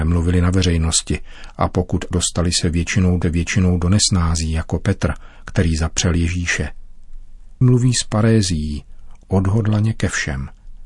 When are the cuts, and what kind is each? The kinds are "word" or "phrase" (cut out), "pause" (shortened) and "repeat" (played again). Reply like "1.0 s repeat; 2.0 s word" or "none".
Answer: 2.1 s word; 3.2 s repeat; 7.6 s word